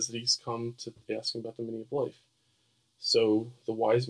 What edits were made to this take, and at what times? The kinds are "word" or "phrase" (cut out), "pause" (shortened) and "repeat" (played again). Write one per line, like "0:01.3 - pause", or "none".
none